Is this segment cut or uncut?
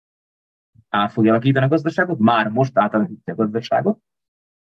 uncut